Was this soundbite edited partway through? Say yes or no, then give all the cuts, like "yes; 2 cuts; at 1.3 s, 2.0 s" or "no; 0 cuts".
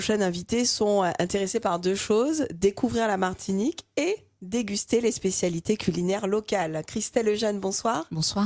no; 0 cuts